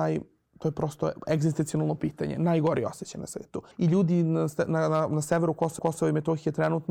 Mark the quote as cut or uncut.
cut